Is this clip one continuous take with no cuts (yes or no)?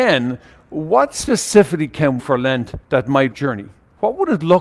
no